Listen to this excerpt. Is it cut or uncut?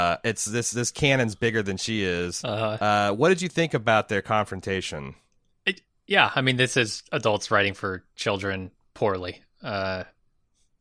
uncut